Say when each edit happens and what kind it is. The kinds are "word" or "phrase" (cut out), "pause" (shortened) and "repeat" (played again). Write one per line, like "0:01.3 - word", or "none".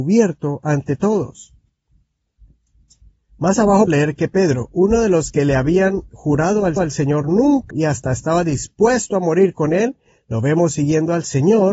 0:03.9 - word
0:06.8 - repeat
0:07.7 - word